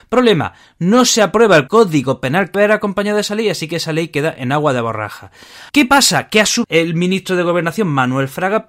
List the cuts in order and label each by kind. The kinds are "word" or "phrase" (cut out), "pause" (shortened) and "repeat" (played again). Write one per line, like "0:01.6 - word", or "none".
0:01.7 - word
0:02.5 - word
0:05.7 - pause
0:06.6 - word